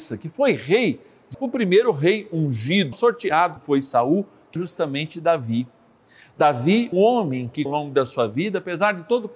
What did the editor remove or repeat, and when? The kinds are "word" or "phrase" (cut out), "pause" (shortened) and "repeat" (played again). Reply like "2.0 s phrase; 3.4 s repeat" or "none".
1.3 s word; 2.9 s word; 3.6 s word; 4.6 s word; 6.9 s word; 7.7 s word